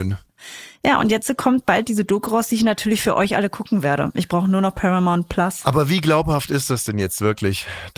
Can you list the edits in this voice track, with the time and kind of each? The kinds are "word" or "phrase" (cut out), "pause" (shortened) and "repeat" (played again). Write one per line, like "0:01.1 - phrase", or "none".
none